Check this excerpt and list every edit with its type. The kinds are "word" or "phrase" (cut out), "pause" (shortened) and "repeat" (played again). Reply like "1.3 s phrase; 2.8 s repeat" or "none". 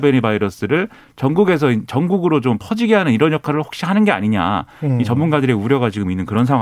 none

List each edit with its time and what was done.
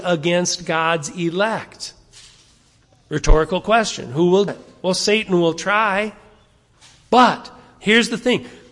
4.5 s word

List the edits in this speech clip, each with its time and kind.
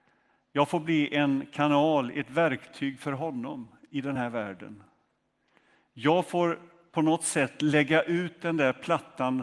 none

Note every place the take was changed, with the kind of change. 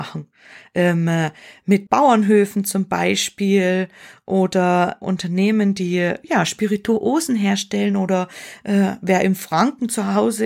1.9 s word; 5.0 s word

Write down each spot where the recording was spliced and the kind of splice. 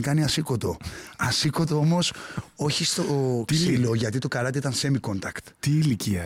none

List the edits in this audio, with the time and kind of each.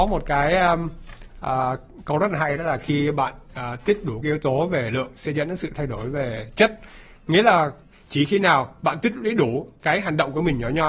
none

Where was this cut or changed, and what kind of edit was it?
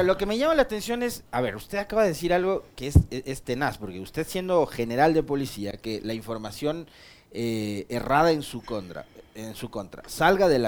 none

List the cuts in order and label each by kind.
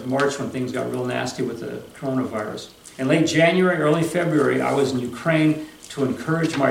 2.9 s pause

